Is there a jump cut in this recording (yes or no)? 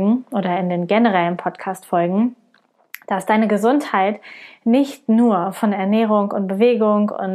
no